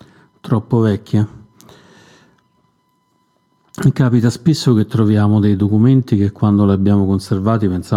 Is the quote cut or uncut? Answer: uncut